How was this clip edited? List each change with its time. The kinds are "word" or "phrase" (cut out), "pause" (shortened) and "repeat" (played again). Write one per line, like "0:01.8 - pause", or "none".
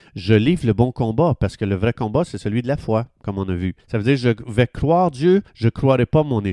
0:03.8 - pause
0:05.5 - pause